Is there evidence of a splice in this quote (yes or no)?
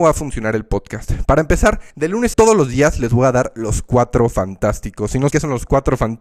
yes